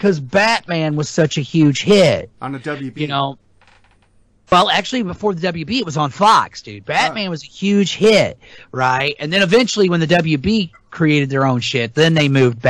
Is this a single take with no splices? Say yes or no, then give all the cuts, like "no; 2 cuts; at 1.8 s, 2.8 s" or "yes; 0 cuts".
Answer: yes; 0 cuts